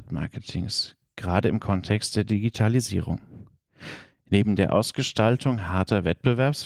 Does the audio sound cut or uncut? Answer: uncut